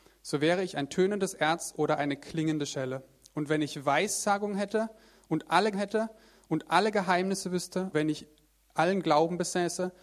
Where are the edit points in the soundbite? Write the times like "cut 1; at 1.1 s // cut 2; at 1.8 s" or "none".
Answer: cut 1; at 5.7 s // cut 2; at 7.9 s